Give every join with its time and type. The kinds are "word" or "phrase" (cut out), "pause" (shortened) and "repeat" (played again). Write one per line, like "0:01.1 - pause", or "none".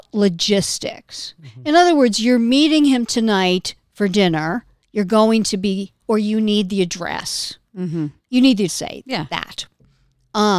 0:06.0 - word
0:08.2 - pause
0:08.7 - word